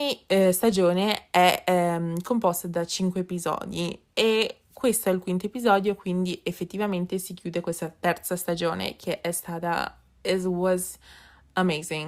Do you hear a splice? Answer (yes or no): no